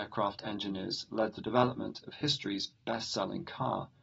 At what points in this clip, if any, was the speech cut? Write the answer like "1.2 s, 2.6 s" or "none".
none